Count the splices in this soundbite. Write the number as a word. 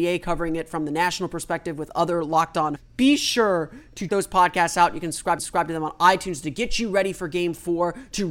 three